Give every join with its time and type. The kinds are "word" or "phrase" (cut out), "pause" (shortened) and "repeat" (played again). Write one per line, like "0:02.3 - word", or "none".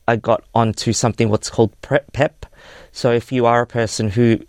none